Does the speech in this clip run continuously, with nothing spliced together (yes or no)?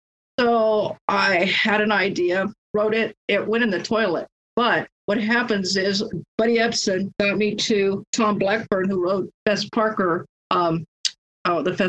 yes